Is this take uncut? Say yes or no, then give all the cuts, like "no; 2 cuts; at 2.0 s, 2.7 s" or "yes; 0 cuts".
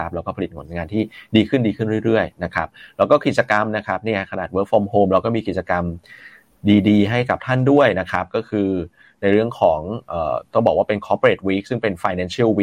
yes; 0 cuts